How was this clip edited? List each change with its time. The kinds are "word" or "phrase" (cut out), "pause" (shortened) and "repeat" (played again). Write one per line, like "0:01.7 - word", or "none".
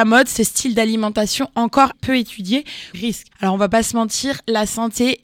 0:01.9 - word
0:02.9 - phrase
0:03.3 - pause

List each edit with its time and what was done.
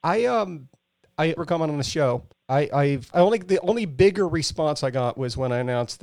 0:01.4 - phrase
0:02.3 - pause
0:03.1 - word

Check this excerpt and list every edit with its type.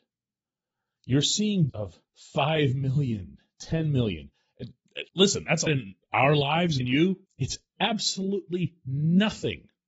0:01.7 - word
0:02.1 - pause
0:05.1 - pause
0:05.7 - word
0:06.0 - pause
0:06.8 - word
0:07.3 - pause

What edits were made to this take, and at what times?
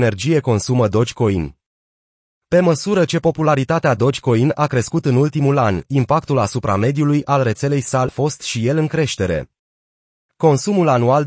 0:08.1 - word

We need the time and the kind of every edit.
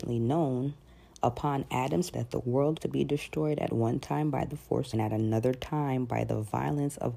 0:02.1 - word
0:02.8 - word
0:04.9 - phrase

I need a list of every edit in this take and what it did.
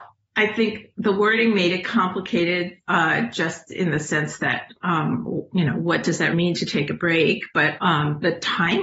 0:06.3 - word
0:07.8 - word

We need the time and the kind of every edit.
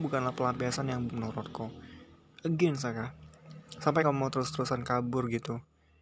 0:01.1 - word
0:04.0 - word

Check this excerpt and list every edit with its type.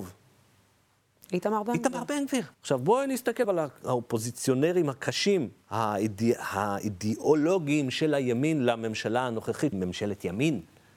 0:02.5 - pause
0:03.4 - word
0:05.6 - pause
0:09.7 - word

